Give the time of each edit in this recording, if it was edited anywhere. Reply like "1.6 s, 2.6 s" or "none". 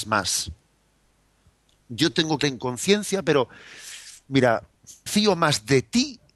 2.4 s, 5.1 s

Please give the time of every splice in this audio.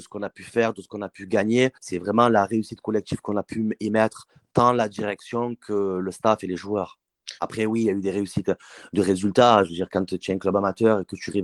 1.8 s

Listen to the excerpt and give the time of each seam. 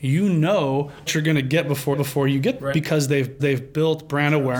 1.1 s, 1.9 s, 2.6 s, 3.4 s

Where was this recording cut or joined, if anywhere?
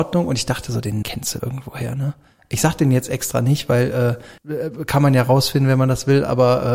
1.0 s, 1.4 s, 4.4 s

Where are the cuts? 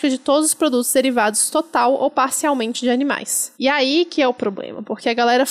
3.5 s

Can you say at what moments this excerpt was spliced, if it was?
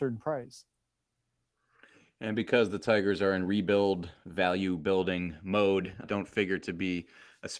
6.0 s

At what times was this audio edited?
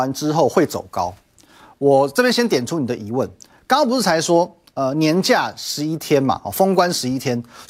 none

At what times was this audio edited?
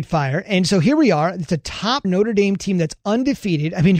2.0 s

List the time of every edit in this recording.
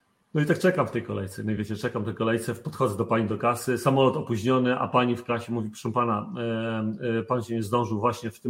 none

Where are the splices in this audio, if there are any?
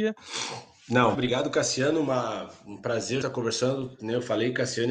1.1 s, 3.2 s

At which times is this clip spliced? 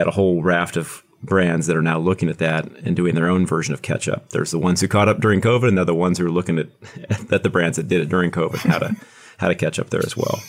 none

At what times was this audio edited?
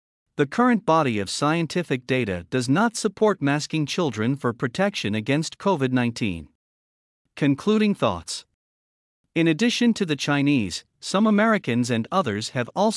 none

